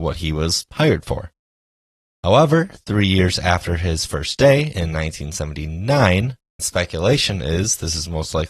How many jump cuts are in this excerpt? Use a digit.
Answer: 1